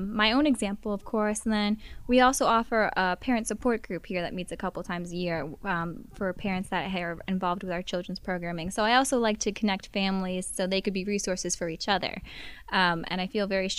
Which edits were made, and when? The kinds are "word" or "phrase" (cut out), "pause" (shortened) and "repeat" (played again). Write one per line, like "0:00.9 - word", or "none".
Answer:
none